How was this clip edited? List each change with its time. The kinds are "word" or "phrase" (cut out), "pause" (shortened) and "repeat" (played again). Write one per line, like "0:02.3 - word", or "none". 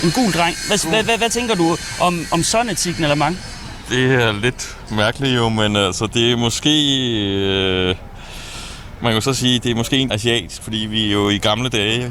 0:01.0 - word
0:10.1 - word